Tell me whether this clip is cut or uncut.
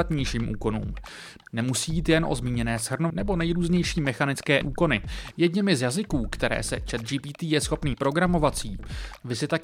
cut